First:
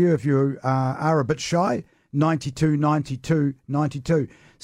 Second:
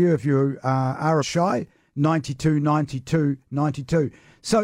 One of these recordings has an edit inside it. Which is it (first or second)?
second